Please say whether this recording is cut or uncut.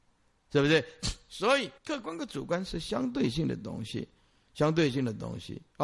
cut